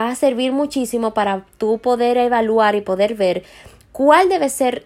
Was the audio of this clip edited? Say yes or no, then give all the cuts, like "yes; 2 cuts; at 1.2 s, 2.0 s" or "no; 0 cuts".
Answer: no; 0 cuts